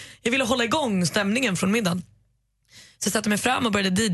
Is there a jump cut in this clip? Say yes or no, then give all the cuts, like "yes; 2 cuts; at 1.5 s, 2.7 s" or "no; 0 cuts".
no; 0 cuts